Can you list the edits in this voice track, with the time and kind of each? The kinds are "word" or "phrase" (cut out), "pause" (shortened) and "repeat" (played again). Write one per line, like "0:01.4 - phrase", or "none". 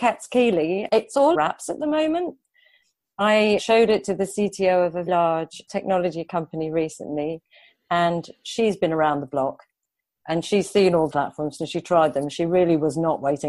0:01.3 - word
0:03.6 - word
0:05.1 - word
0:11.1 - word